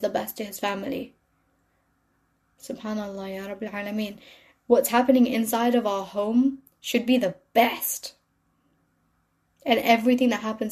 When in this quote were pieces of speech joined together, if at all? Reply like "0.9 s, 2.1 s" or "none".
none